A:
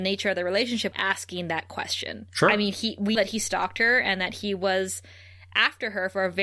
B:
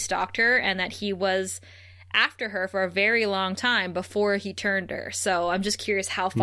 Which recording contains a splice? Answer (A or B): A